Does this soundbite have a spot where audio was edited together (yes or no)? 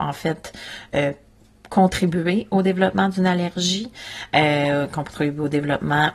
no